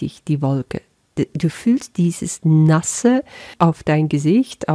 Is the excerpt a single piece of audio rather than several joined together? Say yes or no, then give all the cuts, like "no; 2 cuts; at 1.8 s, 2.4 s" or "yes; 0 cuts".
yes; 0 cuts